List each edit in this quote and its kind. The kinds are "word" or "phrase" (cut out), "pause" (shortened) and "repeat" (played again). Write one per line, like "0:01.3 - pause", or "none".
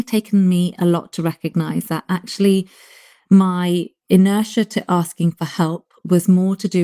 none

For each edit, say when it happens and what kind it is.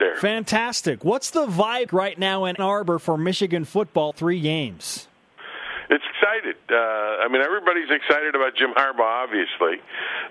0:01.9 - word
0:02.6 - word
0:04.1 - word
0:06.1 - word

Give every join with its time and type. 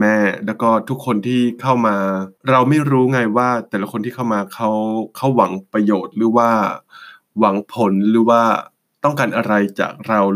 0:02.4 - pause

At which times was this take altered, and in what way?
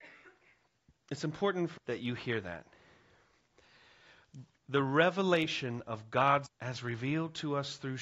0:01.8 - word
0:06.5 - word

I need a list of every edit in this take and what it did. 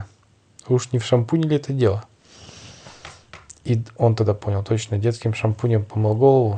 none

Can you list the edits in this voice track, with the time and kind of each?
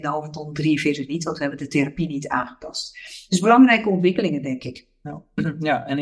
none

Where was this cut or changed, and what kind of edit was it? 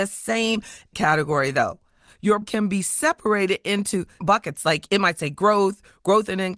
0:00.9 - word
0:02.4 - word
0:04.2 - word

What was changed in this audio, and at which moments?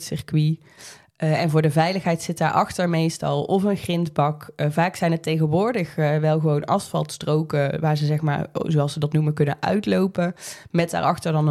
none

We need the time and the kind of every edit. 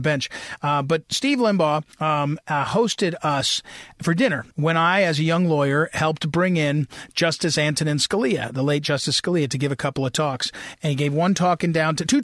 0:01.9 - pause
0:04.5 - pause

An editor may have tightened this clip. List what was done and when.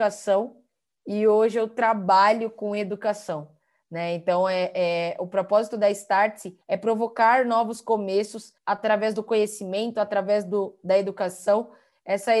0:06.6 - pause
0:08.6 - pause

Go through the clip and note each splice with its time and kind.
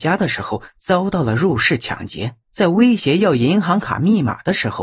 0:02.4 - pause

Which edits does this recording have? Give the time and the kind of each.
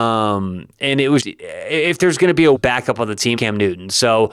0:01.2 - word
0:02.5 - word
0:03.4 - word

